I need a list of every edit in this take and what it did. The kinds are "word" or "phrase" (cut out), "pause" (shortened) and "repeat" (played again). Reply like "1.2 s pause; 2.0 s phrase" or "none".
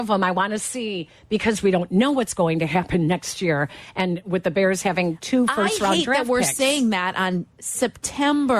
7.5 s pause